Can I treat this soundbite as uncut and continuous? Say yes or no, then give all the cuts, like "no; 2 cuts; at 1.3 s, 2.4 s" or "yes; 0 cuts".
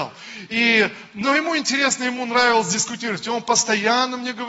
yes; 0 cuts